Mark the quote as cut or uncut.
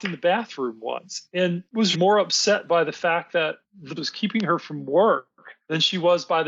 cut